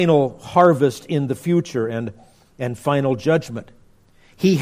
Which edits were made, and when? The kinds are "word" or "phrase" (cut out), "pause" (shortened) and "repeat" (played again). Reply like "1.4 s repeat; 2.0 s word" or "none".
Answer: none

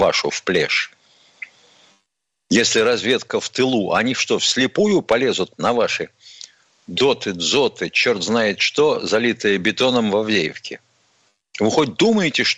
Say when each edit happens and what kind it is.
none

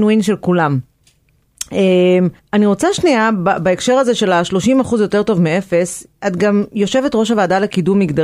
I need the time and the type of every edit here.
2.4 s pause; 6.1 s pause

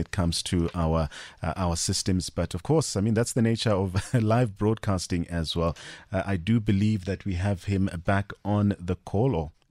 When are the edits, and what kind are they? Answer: none

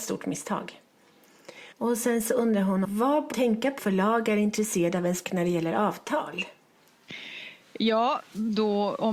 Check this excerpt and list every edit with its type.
1.7 s pause; 2.8 s word; 3.3 s word; 3.8 s word; 5.2 s word

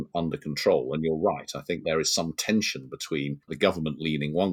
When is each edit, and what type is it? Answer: 3.4 s pause

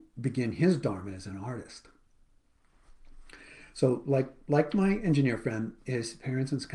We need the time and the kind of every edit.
none

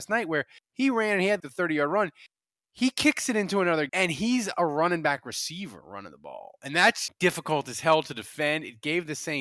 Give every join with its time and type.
1.4 s word; 3.9 s word; 7.1 s word

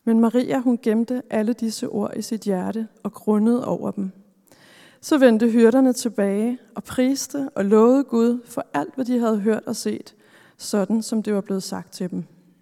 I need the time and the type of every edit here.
none

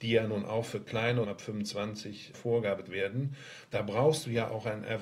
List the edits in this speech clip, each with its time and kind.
1.2 s phrase; 2.3 s phrase; 2.9 s word

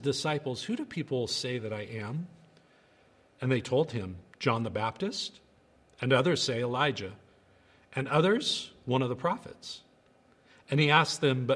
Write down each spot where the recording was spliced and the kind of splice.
none

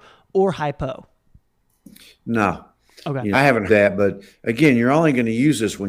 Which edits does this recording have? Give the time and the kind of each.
3.3 s word; 3.7 s word

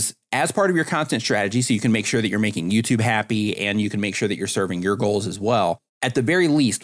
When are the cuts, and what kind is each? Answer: 5.9 s pause

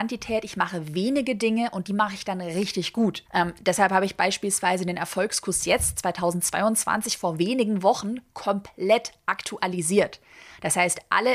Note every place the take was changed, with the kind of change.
3.3 s pause

